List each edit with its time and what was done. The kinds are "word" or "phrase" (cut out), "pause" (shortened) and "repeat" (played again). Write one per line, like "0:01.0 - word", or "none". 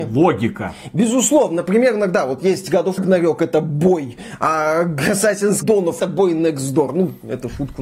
0:02.4 - word
0:03.0 - word
0:05.6 - word
0:06.0 - phrase